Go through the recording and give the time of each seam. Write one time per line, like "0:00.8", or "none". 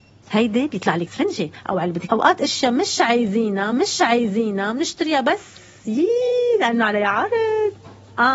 0:01.1
0:02.1
0:03.7